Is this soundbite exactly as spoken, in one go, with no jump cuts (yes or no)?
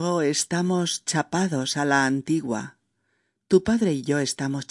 yes